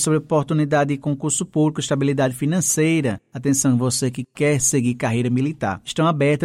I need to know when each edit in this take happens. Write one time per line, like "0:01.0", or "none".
none